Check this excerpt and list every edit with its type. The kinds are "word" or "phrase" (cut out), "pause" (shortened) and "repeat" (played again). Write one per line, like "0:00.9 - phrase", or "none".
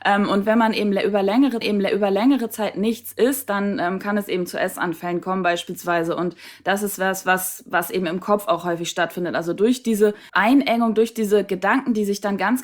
0:01.6 - repeat
0:10.3 - pause